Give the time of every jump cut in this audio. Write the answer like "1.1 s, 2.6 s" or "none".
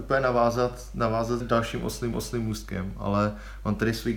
1.4 s, 2.1 s